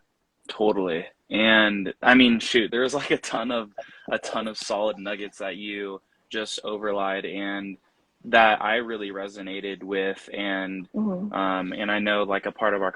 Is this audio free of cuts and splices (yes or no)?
no